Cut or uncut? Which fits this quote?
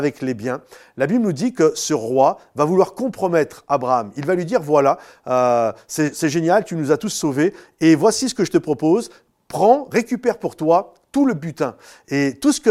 uncut